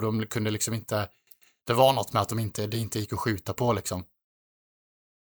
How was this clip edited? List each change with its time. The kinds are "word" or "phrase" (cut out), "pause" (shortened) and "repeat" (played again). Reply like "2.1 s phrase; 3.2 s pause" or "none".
none